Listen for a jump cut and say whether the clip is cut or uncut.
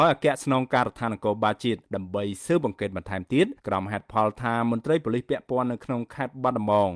cut